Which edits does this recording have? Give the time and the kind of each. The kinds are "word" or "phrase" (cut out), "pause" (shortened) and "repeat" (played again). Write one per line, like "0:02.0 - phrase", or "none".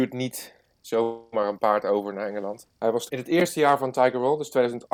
0:03.1 - word